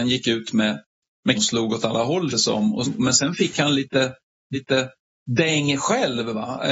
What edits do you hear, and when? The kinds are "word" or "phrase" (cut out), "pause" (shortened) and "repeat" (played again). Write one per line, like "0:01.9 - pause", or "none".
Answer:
0:01.4 - word
0:02.3 - word
0:02.8 - word
0:04.5 - repeat